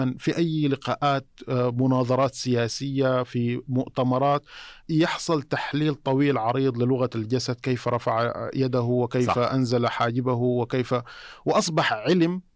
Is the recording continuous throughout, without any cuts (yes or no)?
no